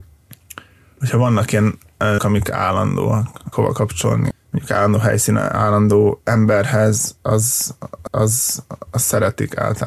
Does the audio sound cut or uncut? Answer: cut